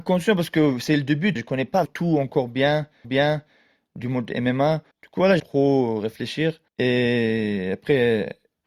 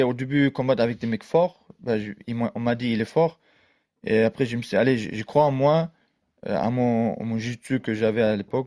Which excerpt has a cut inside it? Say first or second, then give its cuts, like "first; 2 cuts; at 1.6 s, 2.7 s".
first; 6 cuts; at 1.4 s, 1.9 s, 3.0 s, 4.9 s, 5.4 s, 6.7 s